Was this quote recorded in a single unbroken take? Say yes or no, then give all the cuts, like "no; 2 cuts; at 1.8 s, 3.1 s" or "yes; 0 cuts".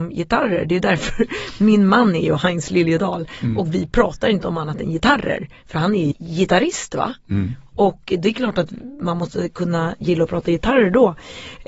no; 1 cut; at 6.1 s